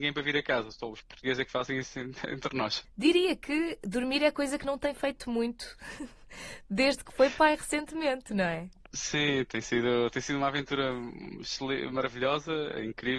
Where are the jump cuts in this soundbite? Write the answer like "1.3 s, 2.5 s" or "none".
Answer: none